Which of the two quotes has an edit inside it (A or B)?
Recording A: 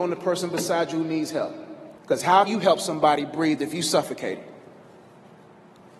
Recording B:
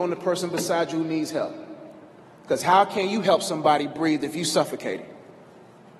A